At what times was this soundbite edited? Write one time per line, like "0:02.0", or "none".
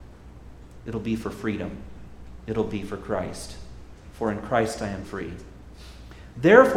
0:05.0